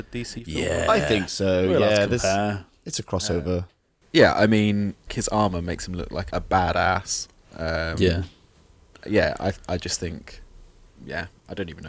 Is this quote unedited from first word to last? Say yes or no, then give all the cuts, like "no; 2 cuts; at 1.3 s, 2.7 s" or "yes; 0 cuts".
no; 2 cuts; at 5.1 s, 6.3 s